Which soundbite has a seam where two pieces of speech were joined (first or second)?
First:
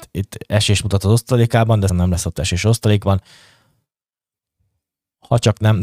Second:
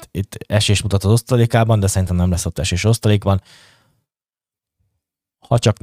first